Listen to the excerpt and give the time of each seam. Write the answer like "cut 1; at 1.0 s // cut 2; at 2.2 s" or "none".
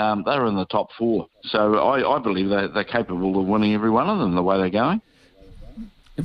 cut 1; at 1.3 s